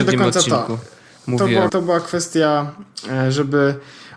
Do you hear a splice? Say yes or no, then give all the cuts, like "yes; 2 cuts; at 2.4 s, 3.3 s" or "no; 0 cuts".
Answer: yes; 1 cut; at 1.7 s